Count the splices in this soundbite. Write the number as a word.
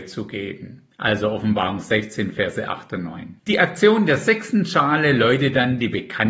two